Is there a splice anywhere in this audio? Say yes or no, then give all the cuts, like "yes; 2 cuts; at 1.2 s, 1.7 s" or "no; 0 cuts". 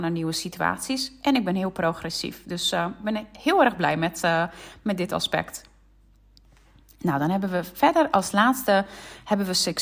no; 0 cuts